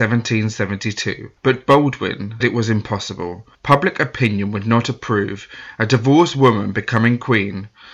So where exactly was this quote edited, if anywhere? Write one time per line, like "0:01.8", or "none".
0:01.4
0:02.4
0:03.5